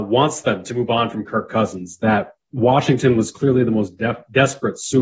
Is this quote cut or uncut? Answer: uncut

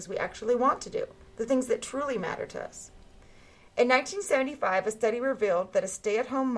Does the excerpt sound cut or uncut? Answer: uncut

